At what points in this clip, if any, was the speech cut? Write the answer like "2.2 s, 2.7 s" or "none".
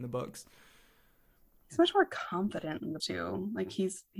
3.0 s